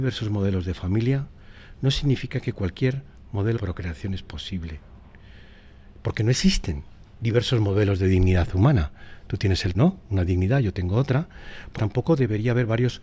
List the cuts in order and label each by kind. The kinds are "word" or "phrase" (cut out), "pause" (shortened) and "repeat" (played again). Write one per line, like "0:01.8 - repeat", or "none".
0:03.6 - word
0:09.7 - word
0:11.8 - phrase